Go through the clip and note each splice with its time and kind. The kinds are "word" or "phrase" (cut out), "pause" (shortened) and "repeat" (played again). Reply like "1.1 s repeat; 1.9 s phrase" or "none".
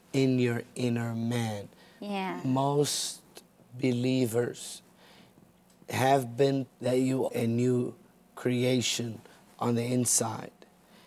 6.7 s word; 7.3 s word